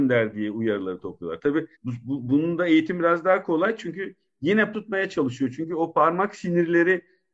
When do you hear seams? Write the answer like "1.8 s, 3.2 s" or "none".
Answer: 1.7 s, 4.7 s